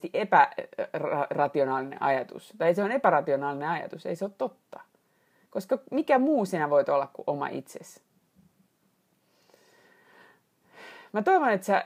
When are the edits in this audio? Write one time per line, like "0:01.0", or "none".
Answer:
none

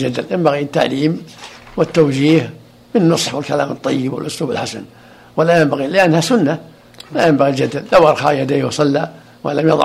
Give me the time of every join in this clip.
none

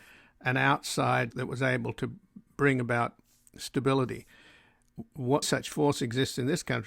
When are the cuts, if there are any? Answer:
0:01.3
0:05.4

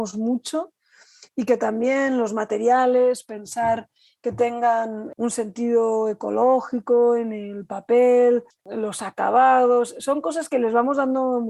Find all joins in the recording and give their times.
0:08.5

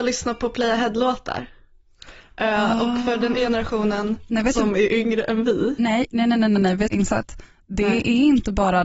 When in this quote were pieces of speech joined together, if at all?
0:03.4
0:06.9

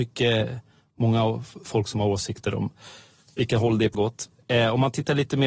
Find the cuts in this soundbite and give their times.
0:03.9

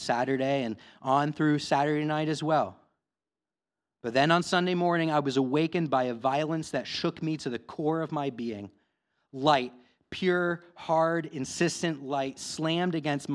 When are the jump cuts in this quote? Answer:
none

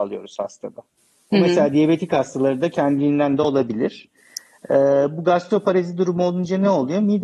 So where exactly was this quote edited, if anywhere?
none

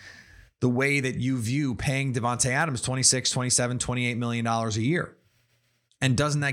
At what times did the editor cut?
none

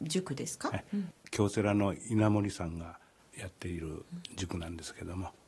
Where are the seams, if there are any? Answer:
none

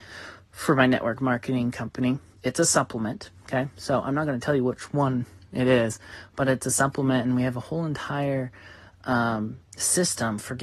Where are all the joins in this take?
none

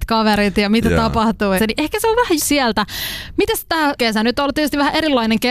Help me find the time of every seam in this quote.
0:01.6
0:02.4
0:04.0

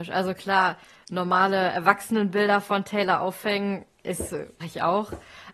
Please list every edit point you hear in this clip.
0:04.6

